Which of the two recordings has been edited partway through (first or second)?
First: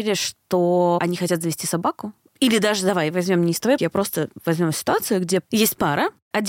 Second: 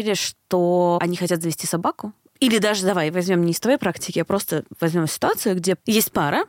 first